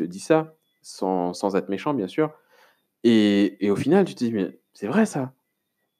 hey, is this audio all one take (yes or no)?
yes